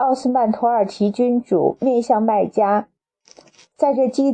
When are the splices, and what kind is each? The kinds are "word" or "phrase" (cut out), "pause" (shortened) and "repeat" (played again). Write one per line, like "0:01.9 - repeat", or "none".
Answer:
none